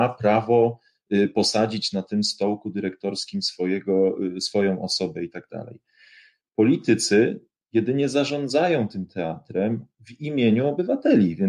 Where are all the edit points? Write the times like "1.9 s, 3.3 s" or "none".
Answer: none